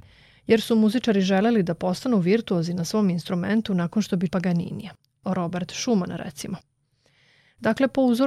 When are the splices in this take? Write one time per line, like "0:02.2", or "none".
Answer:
0:04.3